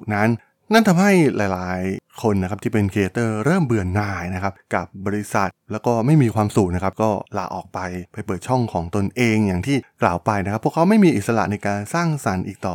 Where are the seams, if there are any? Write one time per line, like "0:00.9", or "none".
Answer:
0:07.3